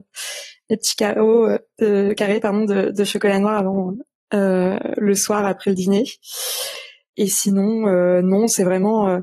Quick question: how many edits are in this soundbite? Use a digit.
0